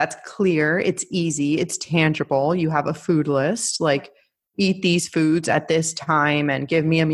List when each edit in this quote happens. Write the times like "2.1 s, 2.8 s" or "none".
none